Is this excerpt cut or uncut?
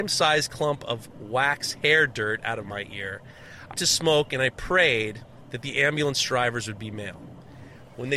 cut